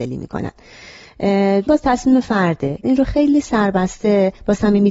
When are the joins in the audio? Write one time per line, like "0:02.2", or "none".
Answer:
0:01.7
0:02.8